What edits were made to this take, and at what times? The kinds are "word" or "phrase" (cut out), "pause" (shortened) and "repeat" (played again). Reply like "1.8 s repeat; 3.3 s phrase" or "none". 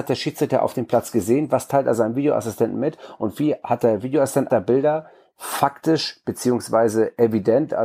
4.5 s word